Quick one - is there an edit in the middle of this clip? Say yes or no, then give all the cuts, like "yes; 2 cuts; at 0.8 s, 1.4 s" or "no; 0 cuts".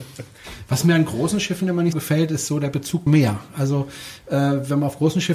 yes; 2 cuts; at 1.9 s, 3.1 s